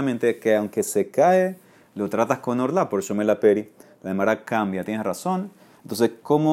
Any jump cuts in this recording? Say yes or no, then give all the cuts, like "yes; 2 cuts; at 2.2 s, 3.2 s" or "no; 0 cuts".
no; 0 cuts